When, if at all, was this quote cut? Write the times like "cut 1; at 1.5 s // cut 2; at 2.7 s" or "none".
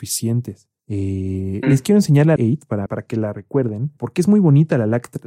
cut 1; at 1.6 s // cut 2; at 2.4 s // cut 3; at 2.9 s // cut 4; at 4.0 s

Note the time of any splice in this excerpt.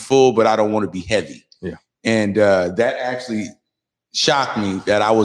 none

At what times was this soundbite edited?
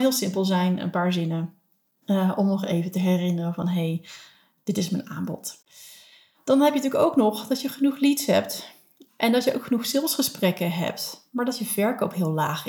none

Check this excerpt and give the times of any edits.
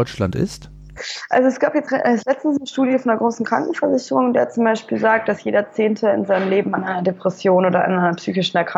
cut 1; at 1.9 s

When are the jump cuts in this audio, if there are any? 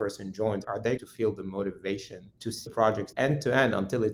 cut 1; at 1.0 s // cut 2; at 2.7 s // cut 3; at 3.1 s

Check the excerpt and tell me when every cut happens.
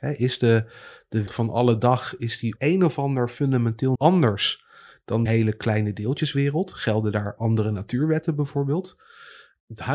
cut 1; at 1.3 s // cut 2; at 2.6 s // cut 3; at 3.9 s // cut 4; at 5.3 s

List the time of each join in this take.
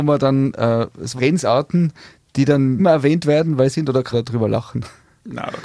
cut 1; at 1.2 s // cut 2; at 2.8 s // cut 3; at 3.7 s // cut 4; at 4.1 s

